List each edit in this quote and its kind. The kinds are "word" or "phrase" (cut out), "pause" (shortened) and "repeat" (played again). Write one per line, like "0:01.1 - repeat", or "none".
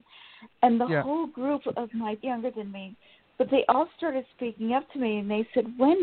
0:02.2 - phrase